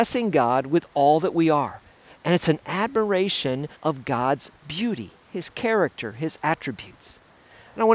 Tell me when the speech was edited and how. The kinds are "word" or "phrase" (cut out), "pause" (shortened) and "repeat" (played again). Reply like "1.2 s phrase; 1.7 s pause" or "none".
3.8 s pause